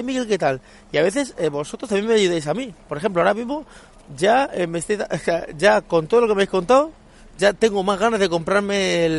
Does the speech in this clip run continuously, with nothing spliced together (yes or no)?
yes